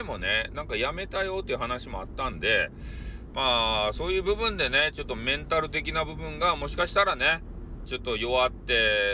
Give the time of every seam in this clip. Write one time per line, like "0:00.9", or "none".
0:07.9